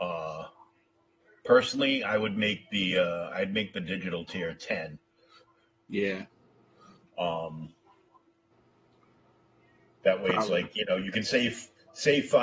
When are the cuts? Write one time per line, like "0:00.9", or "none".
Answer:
none